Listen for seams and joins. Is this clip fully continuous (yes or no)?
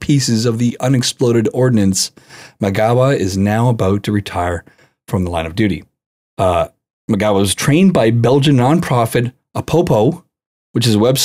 yes